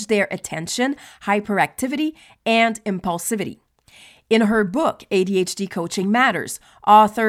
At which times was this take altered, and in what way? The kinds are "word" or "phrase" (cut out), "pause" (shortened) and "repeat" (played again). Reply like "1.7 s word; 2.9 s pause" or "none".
none